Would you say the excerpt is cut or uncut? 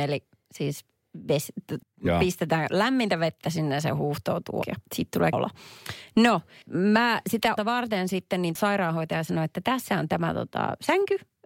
cut